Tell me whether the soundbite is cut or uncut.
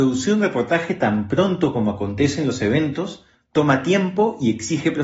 uncut